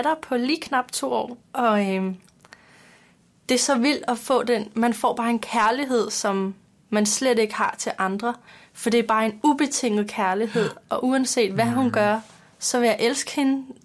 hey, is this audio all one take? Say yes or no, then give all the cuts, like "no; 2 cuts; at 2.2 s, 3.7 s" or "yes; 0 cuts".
no; 2 cuts; at 1.4 s, 8.5 s